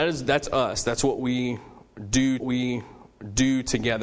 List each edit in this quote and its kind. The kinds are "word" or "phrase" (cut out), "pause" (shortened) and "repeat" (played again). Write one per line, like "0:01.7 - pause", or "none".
0:02.4 - repeat